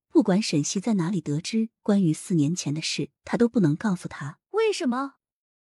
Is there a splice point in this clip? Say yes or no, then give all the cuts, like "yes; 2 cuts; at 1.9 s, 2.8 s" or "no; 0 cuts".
yes; 2 cuts; at 3.2 s, 4.4 s